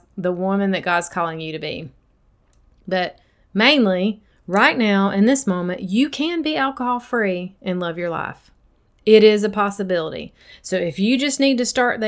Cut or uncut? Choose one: uncut